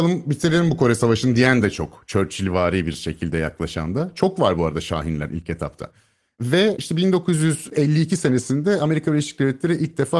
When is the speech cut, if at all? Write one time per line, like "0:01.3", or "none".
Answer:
none